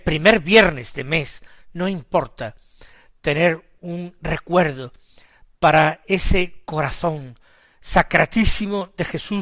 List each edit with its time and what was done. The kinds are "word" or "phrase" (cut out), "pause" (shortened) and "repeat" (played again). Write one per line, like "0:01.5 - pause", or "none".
none